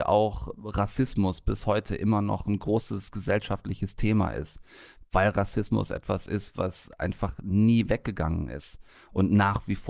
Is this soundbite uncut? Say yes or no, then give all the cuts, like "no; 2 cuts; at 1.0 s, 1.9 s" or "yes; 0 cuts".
yes; 0 cuts